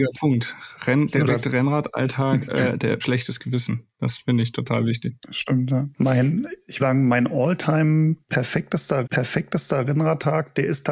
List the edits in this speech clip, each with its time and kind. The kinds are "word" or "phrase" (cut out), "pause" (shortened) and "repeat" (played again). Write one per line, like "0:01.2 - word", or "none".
0:01.3 - word
0:03.0 - phrase
0:03.9 - pause
0:05.2 - pause
0:05.9 - pause
0:06.8 - word
0:09.0 - repeat